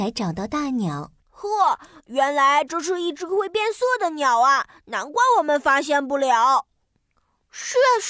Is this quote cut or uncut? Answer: cut